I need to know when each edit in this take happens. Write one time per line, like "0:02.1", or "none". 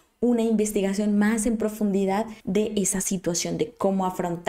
0:02.4